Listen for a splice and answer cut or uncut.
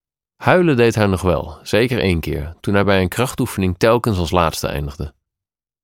uncut